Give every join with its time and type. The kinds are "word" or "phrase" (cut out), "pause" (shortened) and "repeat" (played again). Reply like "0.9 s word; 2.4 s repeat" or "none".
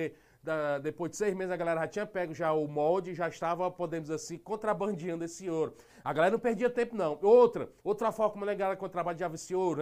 7.8 s pause